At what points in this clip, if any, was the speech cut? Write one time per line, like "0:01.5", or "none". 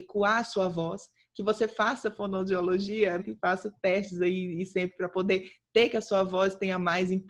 0:03.2

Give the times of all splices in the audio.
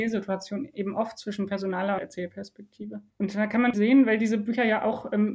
0:02.0
0:03.1
0:03.7

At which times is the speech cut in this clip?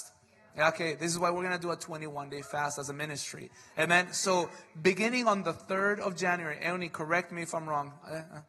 none

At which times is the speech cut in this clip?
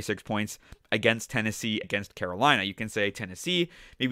0:01.8

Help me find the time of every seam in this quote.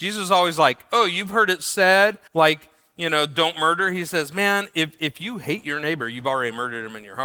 0:02.3

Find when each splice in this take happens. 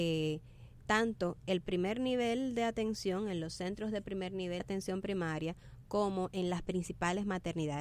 0:04.6

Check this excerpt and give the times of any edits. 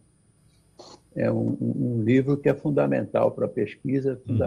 none

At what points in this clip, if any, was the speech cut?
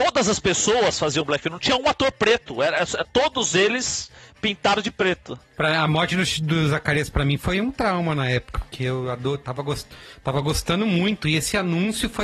none

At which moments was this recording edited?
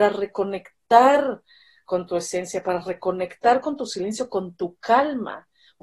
none

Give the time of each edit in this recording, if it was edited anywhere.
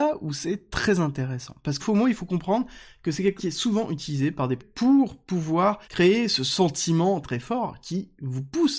0:01.8
0:03.4
0:04.6
0:05.8
0:07.2

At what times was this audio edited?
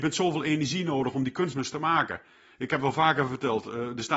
none

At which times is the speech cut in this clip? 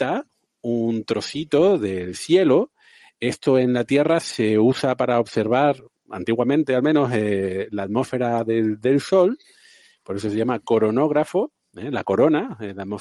none

